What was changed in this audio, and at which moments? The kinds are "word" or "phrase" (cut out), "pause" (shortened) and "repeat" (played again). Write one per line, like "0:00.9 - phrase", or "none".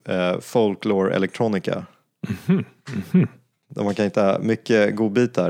none